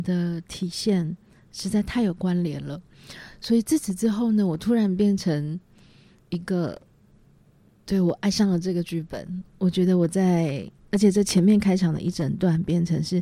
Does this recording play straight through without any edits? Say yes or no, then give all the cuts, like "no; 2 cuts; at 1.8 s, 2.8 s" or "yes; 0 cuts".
no; 1 cut; at 10.8 s